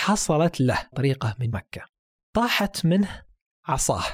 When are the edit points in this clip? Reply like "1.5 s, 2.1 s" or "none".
0.9 s, 1.5 s